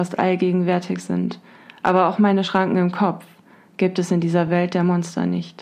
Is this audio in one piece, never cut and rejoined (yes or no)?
yes